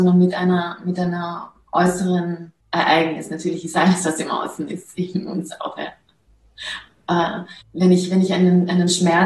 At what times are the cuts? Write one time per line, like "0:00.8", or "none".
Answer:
0:02.6
0:07.6